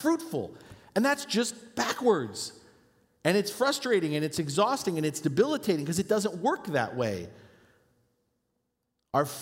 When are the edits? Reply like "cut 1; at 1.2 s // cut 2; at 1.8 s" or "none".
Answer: none